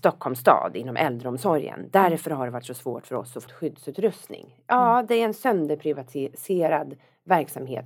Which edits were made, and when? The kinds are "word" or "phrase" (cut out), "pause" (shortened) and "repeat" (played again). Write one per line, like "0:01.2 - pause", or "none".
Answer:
0:03.5 - word